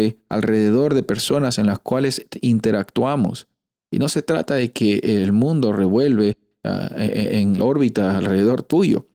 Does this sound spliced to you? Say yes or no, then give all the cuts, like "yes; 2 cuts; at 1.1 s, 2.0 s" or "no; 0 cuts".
yes; 1 cut; at 7.6 s